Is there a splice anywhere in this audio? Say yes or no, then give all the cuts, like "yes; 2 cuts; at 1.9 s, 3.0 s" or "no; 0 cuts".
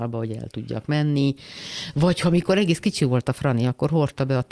no; 0 cuts